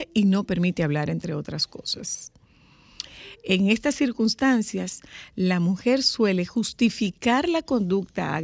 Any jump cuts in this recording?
no; 0 cuts

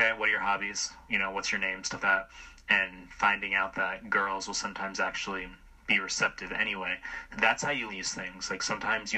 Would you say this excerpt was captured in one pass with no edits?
no; 3 cuts; at 1.1 s, 2.0 s, 7.9 s

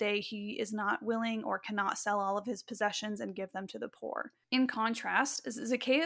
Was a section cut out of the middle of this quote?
yes; 1 cut; at 4.4 s

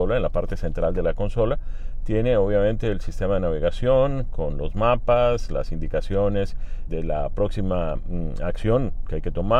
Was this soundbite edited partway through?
yes; 1 cut; at 6.9 s

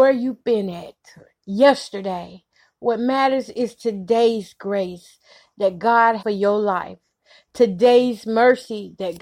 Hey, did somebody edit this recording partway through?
yes; 1 cut; at 6.2 s

